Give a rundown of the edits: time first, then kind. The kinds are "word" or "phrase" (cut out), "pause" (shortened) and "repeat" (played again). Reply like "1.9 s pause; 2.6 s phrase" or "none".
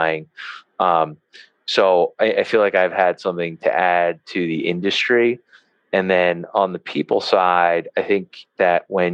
none